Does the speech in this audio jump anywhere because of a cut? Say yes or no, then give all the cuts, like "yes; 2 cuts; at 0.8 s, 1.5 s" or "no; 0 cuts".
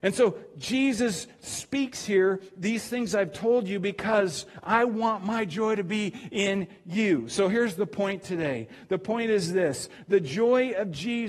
no; 0 cuts